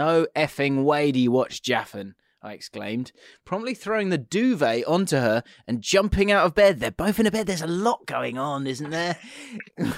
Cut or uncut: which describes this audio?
uncut